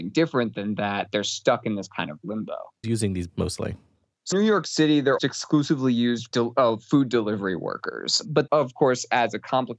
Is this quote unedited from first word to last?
no; 6 cuts; at 2.8 s, 3.3 s, 4.3 s, 5.2 s, 6.3 s, 8.5 s

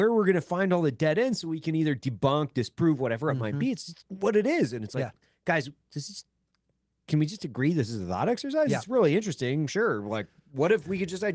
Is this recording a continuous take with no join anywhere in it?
yes; 0 cuts

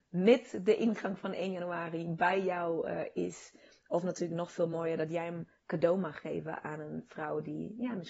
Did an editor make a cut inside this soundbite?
no; 0 cuts

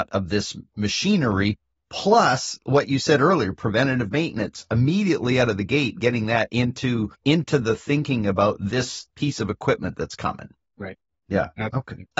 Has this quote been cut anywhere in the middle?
yes; 1 cut; at 7.1 s

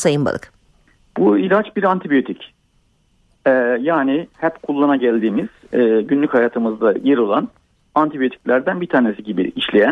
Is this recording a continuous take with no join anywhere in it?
yes; 0 cuts

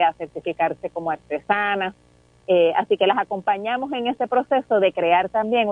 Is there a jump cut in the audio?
no; 0 cuts

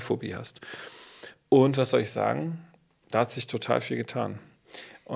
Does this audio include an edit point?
no; 0 cuts

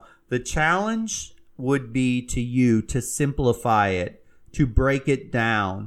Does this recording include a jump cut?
no; 0 cuts

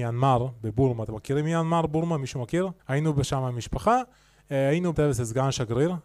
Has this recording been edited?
yes; 2 cuts; at 2.8 s, 4.9 s

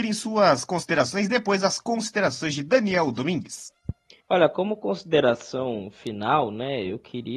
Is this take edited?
no; 0 cuts

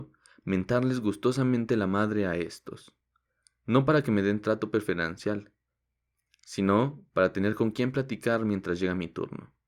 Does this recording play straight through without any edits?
yes; 0 cuts

